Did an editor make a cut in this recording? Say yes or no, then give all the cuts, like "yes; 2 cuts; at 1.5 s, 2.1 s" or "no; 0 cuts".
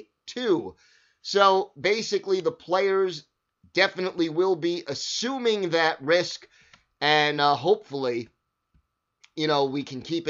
no; 0 cuts